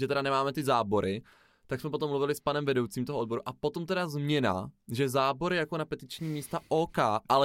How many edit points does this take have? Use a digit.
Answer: 0